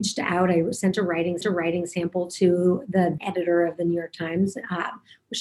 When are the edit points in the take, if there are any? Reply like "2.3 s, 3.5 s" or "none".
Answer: 1.4 s, 3.2 s